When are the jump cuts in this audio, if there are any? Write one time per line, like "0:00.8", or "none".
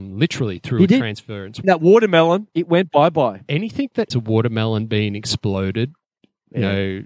0:01.6
0:02.5
0:04.1

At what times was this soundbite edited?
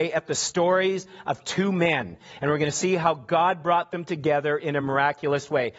none

